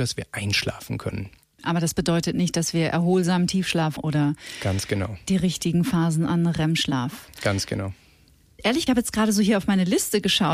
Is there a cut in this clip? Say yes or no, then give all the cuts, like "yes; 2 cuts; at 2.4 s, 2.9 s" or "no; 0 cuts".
yes; 3 cuts; at 1.4 s, 4.0 s, 8.9 s